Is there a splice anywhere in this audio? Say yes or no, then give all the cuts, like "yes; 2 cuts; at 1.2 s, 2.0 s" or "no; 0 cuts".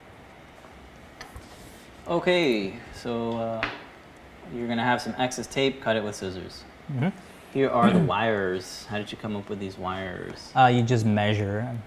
no; 0 cuts